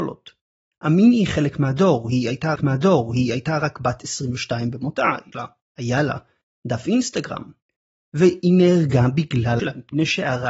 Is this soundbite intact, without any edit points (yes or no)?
no